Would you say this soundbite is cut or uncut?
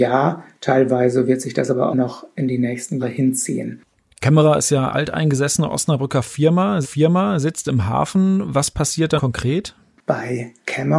cut